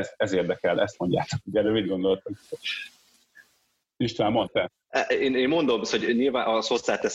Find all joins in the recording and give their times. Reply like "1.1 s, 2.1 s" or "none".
none